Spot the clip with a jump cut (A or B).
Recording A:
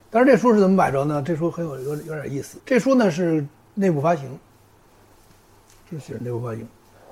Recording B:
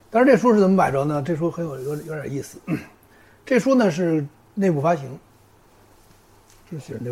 A